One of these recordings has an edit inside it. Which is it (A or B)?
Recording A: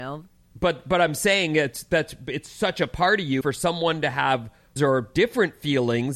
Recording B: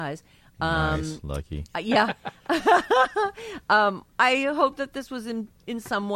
A